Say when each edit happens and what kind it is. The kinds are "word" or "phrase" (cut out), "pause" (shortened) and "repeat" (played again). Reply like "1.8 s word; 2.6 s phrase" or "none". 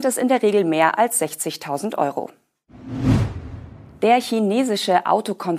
none